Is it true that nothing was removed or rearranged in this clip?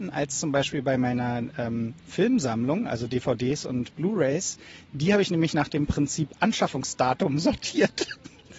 no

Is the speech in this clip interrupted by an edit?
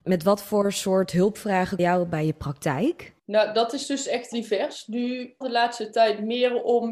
yes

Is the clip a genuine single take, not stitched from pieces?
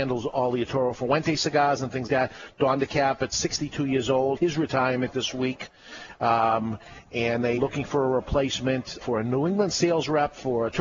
no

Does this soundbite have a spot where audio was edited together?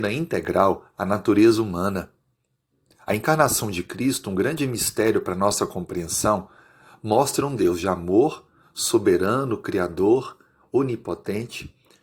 no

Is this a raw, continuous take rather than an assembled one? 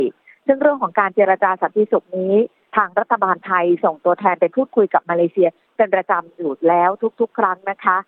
yes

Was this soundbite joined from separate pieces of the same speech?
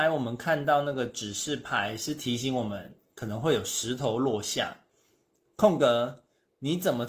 no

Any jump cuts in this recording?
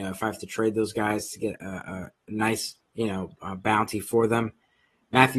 yes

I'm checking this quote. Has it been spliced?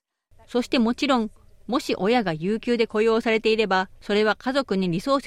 no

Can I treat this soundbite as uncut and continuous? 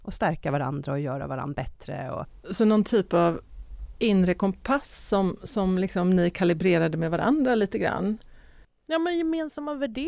yes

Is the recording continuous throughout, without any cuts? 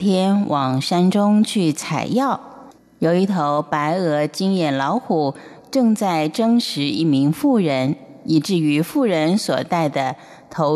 yes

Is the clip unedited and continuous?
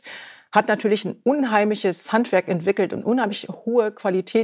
yes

